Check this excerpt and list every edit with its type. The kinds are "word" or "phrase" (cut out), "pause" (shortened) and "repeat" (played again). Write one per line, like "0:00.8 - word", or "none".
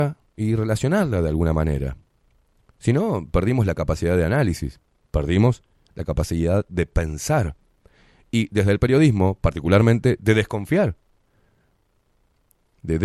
none